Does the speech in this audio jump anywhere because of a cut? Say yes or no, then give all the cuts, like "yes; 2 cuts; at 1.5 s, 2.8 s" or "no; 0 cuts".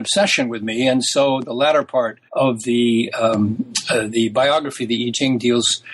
yes; 1 cut; at 2.3 s